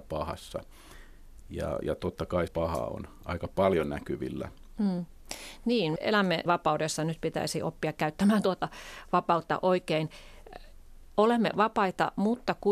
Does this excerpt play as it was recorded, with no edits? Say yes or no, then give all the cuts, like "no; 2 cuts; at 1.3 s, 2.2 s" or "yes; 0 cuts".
no; 3 cuts; at 2.5 s, 6.0 s, 6.5 s